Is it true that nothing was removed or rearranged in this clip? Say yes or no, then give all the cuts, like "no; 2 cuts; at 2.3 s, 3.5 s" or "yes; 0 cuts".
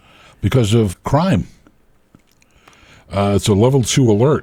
no; 1 cut; at 0.9 s